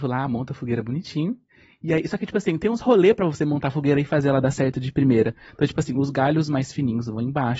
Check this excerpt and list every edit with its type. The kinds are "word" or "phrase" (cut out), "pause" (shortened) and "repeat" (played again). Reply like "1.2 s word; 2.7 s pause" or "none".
none

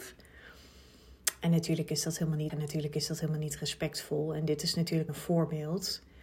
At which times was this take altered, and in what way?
2.5 s word; 5.1 s word

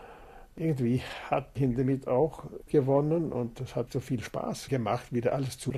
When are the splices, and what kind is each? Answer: 1.6 s word; 2.7 s word; 3.9 s phrase

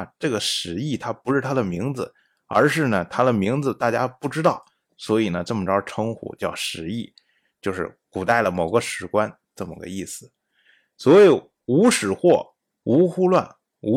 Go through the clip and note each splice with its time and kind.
none

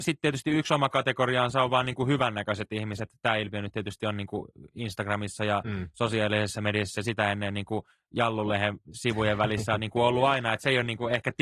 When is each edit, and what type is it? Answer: none

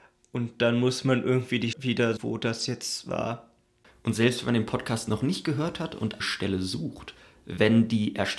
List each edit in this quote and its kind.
1.7 s word; 2.2 s word; 6.2 s word

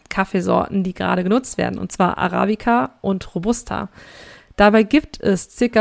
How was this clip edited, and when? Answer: none

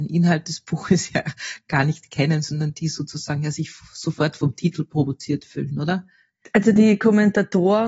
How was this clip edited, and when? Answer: none

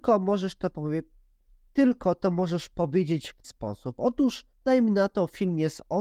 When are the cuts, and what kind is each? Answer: 3.4 s word; 4.5 s pause

